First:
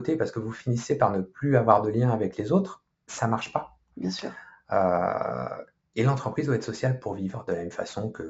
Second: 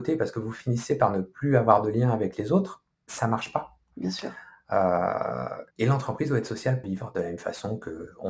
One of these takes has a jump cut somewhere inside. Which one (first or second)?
second